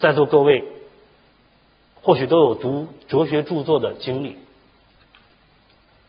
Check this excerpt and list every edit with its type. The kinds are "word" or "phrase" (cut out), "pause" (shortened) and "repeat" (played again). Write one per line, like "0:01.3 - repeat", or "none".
none